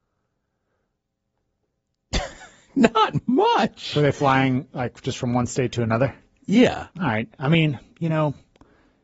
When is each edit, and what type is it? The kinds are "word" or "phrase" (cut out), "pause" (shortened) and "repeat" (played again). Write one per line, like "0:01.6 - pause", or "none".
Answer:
0:06.9 - pause